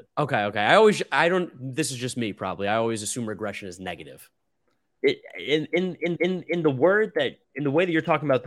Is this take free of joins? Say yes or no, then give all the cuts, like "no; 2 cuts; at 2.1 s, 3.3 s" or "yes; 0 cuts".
no; 2 cuts; at 6.2 s, 7.4 s